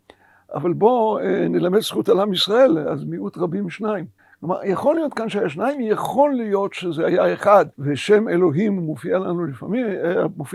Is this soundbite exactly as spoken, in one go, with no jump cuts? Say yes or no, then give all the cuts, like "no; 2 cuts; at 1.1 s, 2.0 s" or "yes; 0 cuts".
no; 2 cuts; at 4.2 s, 7.7 s